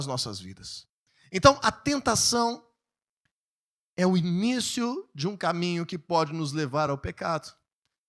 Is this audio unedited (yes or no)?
yes